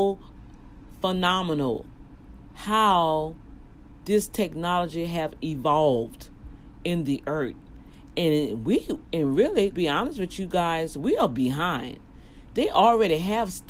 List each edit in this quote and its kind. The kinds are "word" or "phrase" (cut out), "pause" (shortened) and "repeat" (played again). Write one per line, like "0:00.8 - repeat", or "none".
0:09.7 - word